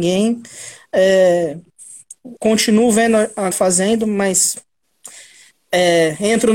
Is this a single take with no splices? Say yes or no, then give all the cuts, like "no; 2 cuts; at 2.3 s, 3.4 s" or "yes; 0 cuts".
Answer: no; 2 cuts; at 2.4 s, 3.5 s